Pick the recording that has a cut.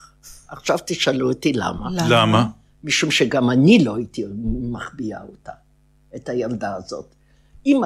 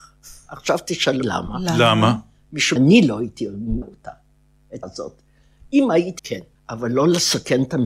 second; 6 cuts; at 1.2 s, 2.8 s, 3.8 s, 4.8 s, 6.2 s, 6.5 s

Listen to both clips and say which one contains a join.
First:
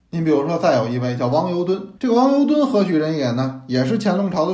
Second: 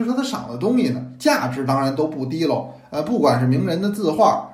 first; 1 cut; at 2.0 s

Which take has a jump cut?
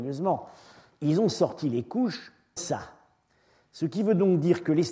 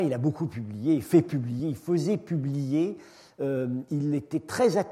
first; 1 cut; at 2.6 s

